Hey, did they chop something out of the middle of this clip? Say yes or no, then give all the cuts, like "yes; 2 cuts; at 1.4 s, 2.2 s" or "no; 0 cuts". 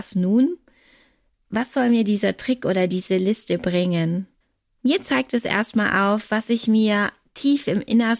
yes; 1 cut; at 4.4 s